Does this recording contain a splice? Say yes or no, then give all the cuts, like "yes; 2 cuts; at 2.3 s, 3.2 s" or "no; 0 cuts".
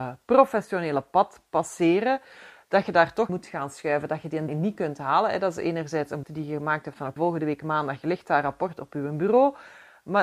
yes; 4 cuts; at 3.3 s, 4.5 s, 6.2 s, 7.2 s